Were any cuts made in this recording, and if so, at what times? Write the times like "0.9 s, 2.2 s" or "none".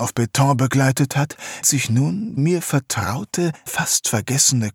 1.6 s, 2.4 s, 3.7 s